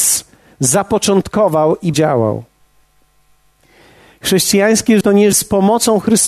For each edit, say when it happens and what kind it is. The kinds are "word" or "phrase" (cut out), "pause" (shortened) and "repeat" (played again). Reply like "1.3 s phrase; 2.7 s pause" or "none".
1.9 s word; 5.0 s word; 5.3 s word